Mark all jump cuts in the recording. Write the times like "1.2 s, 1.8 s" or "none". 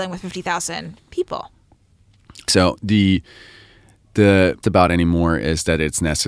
2.5 s, 4.6 s